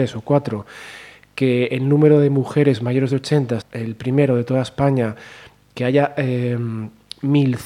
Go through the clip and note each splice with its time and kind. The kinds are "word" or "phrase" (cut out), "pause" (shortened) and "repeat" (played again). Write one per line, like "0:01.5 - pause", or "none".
0:03.6 - word